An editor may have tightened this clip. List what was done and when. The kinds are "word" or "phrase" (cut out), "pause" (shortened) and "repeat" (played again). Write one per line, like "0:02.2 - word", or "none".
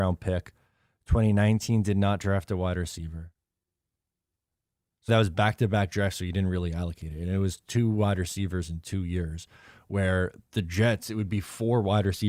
0:05.1 - word